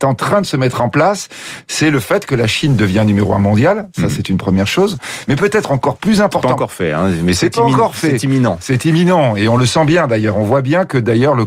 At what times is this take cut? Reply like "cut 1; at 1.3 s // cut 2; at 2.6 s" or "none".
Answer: cut 1; at 7.3 s